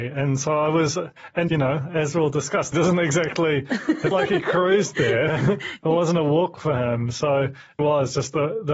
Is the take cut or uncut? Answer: cut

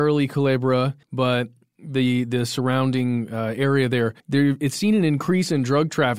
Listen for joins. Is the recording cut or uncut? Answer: cut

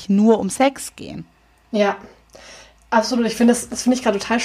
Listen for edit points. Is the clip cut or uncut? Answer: uncut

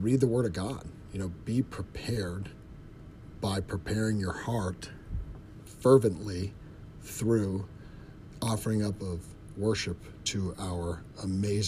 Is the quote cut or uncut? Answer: uncut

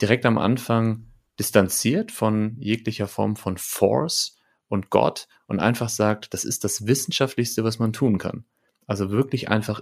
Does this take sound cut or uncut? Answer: uncut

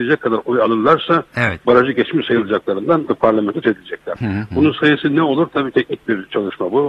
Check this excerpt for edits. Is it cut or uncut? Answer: cut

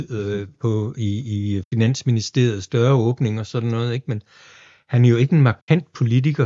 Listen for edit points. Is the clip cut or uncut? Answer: uncut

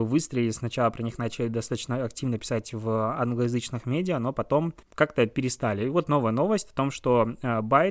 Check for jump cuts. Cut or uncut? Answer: cut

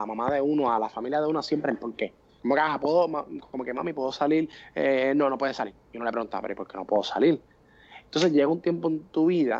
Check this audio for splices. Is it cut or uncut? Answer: cut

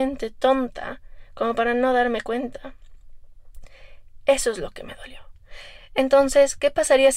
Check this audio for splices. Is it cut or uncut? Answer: uncut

